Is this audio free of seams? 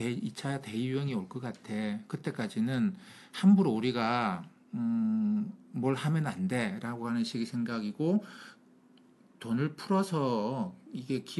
yes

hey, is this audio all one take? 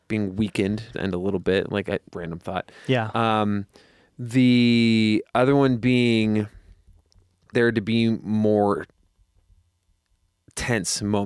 no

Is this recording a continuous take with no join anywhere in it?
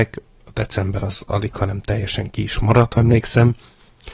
no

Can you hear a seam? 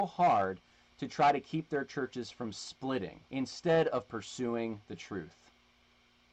yes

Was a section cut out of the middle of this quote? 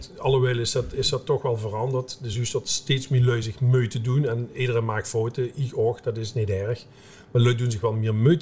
no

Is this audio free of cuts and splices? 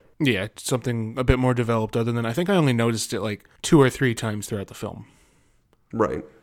no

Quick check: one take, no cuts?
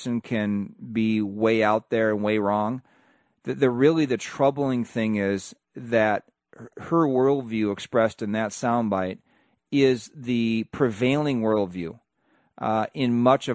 yes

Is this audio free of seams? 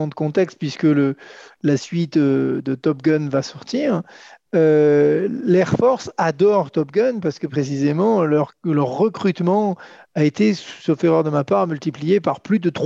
yes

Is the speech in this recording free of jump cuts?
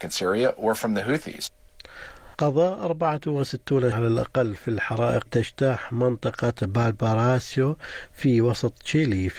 no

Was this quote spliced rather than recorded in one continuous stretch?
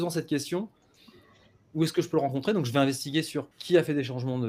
yes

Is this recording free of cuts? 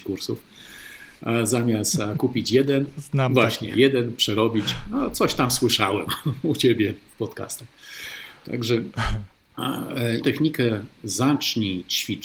no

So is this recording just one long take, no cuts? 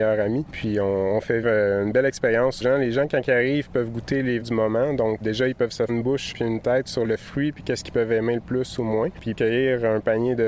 no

